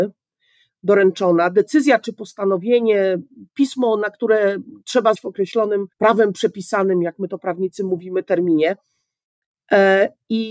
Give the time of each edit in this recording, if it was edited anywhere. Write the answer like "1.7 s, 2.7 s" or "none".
5.1 s, 5.9 s